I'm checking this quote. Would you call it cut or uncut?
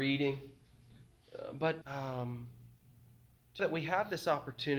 cut